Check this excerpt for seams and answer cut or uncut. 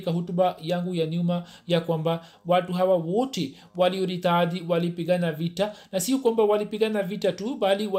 uncut